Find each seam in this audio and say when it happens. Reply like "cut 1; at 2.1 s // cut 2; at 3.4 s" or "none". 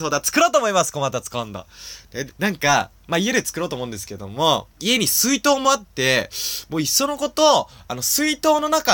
cut 1; at 2.3 s // cut 2; at 4.7 s